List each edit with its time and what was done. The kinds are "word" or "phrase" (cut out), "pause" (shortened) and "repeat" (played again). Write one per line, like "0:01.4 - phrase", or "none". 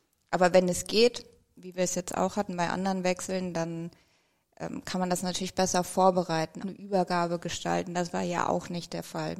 0:06.6 - word